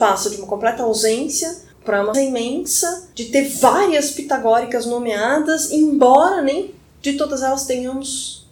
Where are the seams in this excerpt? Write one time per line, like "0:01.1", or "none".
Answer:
0:01.7
0:02.1
0:03.1